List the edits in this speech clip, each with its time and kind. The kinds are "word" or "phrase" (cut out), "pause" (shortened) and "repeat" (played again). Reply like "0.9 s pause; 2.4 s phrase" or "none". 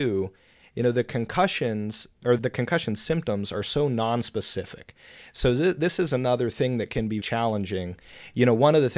2.4 s word; 7.2 s word